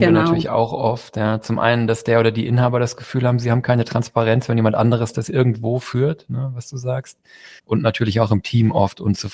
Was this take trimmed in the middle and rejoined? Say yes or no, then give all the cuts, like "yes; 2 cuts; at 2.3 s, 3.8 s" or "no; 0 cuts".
yes; 1 cut; at 7.6 s